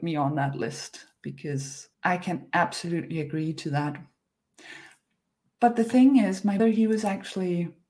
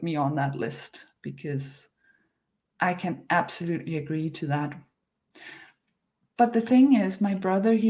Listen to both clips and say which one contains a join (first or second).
first